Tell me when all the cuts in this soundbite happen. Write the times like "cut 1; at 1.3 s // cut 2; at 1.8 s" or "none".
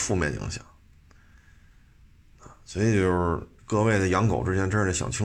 cut 1; at 2.6 s // cut 2; at 3.6 s